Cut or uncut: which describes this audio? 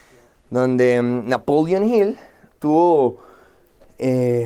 uncut